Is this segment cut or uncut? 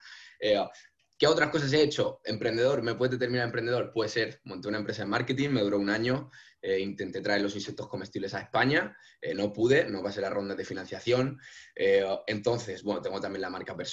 uncut